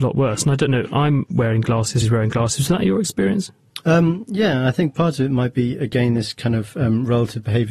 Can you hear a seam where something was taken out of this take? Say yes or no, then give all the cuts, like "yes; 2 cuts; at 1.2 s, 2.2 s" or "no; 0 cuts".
yes; 1 cut; at 2.0 s